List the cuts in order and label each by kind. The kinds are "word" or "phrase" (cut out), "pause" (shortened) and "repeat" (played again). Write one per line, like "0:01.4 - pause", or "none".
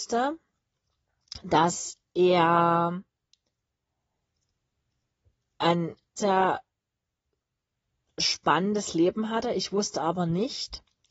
0:06.2 - word